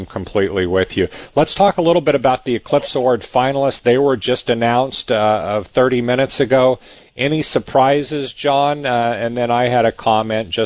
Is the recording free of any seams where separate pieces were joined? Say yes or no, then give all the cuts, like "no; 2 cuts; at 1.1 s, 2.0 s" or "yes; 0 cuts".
yes; 0 cuts